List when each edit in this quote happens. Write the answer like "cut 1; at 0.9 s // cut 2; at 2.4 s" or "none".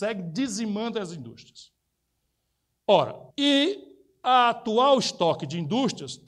cut 1; at 3.3 s